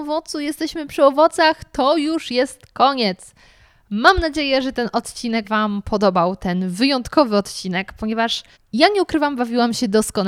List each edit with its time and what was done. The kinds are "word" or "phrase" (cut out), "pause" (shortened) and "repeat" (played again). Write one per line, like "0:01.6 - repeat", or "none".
0:05.4 - word
0:08.5 - pause